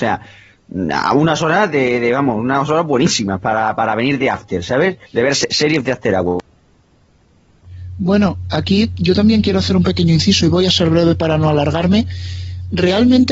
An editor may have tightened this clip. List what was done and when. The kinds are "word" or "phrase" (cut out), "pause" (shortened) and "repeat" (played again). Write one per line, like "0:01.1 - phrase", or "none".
0:05.1 - pause